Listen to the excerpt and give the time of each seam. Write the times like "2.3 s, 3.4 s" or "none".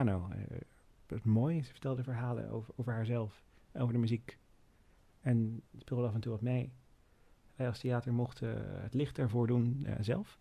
none